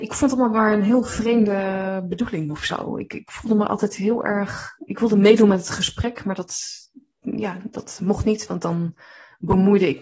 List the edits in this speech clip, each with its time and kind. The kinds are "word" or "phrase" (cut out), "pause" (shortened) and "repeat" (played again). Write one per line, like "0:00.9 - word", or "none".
none